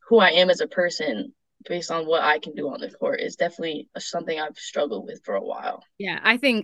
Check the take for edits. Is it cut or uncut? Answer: uncut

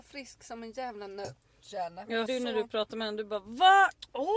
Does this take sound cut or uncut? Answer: cut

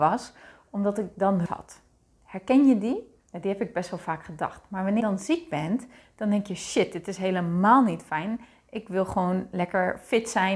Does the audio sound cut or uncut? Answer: cut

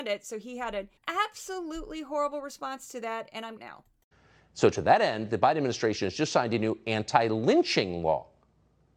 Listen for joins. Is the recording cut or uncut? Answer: cut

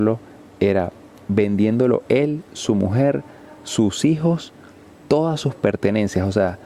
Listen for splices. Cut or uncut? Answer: uncut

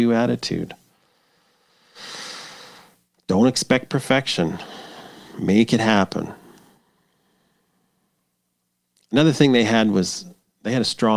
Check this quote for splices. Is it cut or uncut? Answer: uncut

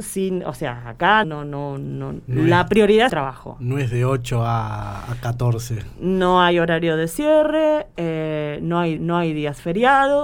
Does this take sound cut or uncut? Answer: cut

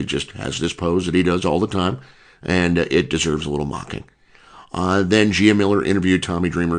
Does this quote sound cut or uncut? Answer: uncut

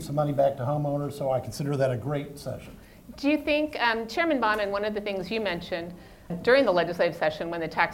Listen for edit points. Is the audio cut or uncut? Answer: cut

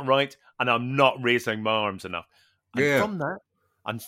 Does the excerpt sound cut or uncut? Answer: uncut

